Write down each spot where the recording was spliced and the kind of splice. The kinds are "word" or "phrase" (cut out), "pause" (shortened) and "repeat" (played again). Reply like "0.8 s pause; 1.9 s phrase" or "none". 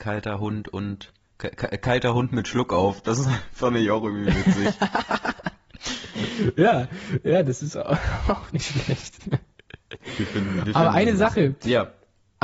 none